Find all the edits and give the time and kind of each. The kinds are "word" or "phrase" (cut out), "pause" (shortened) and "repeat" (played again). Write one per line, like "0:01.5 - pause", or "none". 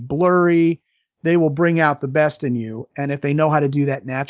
none